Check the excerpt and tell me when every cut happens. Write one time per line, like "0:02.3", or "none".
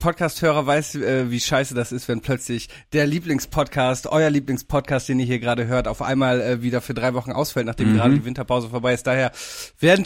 none